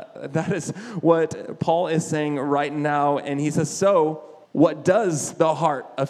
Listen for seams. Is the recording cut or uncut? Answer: cut